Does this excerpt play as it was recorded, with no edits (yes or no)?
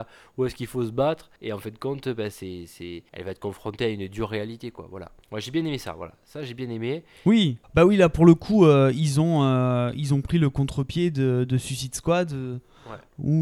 no